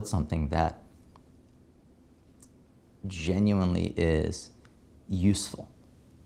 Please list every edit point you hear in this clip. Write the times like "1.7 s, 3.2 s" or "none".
none